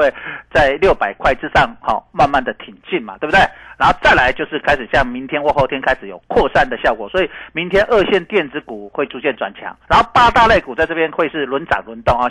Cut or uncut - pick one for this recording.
cut